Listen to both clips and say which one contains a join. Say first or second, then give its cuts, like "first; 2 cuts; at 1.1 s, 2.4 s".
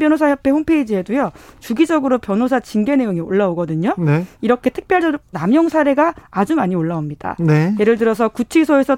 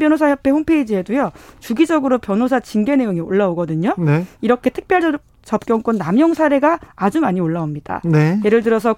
first; 1 cut; at 5.3 s